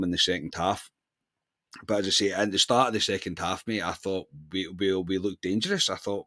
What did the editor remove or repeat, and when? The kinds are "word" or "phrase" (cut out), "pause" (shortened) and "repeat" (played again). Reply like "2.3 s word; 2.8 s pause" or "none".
none